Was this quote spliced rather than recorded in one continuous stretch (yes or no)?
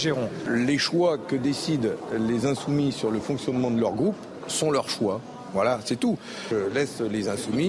no